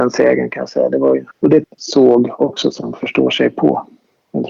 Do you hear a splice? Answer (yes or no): yes